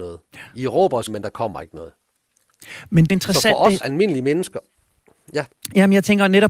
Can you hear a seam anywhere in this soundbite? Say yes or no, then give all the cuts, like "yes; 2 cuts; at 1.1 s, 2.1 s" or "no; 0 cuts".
yes; 3 cuts; at 1.1 s, 3.1 s, 3.8 s